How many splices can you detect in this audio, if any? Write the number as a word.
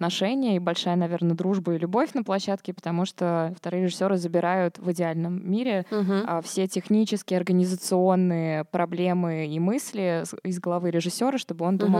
zero